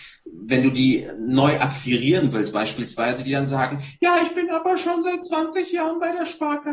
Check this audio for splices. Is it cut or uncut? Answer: uncut